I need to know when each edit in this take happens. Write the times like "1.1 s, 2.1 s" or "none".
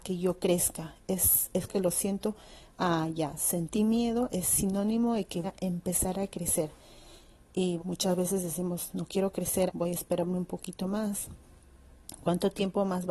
1.7 s, 4.3 s, 5.4 s, 7.8 s, 9.7 s